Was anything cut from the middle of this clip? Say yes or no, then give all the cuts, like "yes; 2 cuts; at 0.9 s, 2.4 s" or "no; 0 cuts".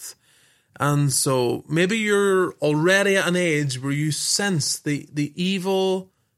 no; 0 cuts